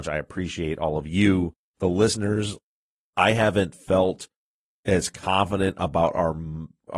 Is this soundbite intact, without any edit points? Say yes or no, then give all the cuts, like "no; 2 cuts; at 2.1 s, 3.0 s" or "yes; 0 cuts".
yes; 0 cuts